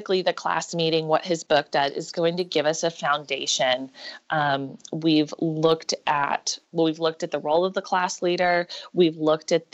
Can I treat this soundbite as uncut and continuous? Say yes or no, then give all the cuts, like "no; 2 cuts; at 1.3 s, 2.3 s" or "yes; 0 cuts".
yes; 0 cuts